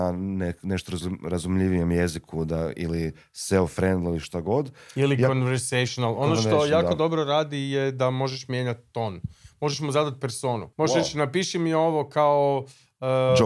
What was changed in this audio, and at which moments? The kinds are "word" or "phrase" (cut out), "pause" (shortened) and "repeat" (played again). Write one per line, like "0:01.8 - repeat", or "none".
0:10.7 - pause